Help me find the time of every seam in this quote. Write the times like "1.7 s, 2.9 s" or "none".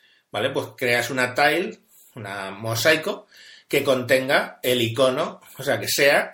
none